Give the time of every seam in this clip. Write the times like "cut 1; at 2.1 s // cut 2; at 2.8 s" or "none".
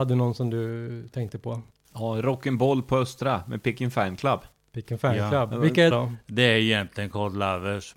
cut 1; at 5.9 s